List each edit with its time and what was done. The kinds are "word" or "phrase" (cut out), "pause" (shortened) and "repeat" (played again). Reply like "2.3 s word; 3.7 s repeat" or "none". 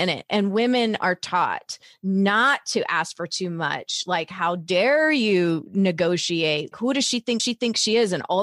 1.8 s pause; 6.7 s word; 7.4 s repeat

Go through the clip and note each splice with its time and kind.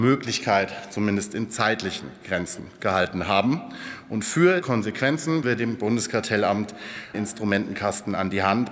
4.6 s word; 5.4 s word; 7.1 s word

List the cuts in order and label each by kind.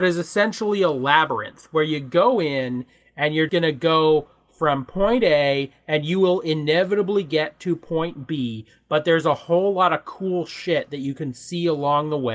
3.5 s word

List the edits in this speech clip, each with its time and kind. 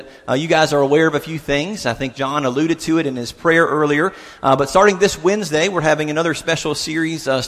none

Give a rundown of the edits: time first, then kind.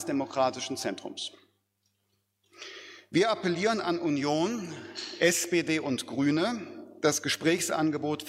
none

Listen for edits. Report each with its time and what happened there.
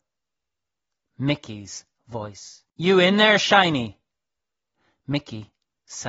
2.7 s pause

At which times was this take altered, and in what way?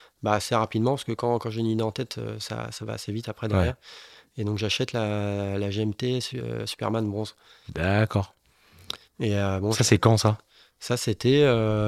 none

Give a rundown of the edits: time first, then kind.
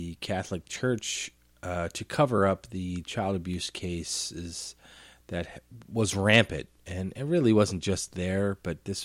none

